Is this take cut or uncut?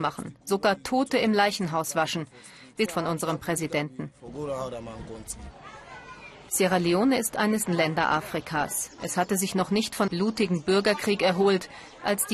cut